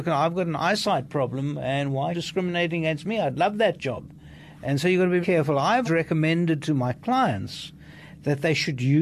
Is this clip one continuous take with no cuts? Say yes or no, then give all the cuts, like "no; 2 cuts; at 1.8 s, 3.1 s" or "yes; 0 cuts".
no; 3 cuts; at 2.1 s, 5.2 s, 5.8 s